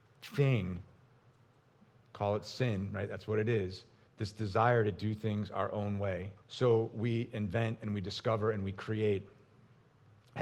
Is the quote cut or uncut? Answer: cut